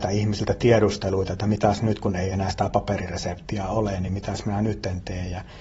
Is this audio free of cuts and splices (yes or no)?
yes